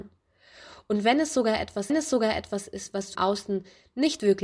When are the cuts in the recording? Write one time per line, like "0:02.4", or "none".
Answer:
0:01.9
0:03.1